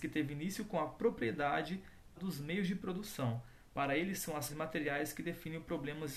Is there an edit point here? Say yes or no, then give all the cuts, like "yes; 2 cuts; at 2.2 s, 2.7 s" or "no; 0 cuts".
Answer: yes; 2 cuts; at 2.2 s, 4.5 s